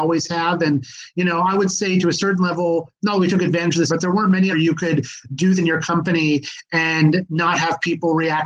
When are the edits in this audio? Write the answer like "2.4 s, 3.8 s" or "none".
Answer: 3.9 s, 4.5 s, 5.6 s